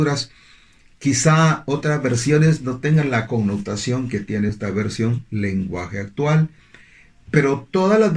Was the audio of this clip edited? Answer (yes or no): no